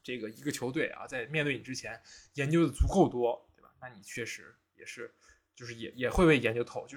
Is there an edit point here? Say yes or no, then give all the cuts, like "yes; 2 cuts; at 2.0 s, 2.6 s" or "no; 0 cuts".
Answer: no; 0 cuts